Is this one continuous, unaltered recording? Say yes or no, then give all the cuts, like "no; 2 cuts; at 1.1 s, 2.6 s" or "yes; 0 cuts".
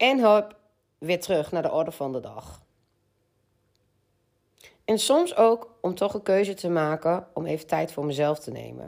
yes; 0 cuts